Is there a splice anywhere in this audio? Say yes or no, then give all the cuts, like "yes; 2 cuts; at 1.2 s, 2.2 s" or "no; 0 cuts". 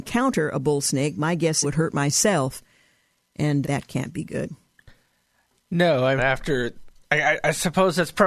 yes; 3 cuts; at 1.6 s, 3.6 s, 6.2 s